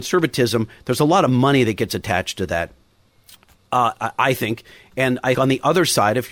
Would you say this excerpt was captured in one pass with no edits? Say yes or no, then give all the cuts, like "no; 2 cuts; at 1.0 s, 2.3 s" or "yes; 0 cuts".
no; 1 cut; at 5.3 s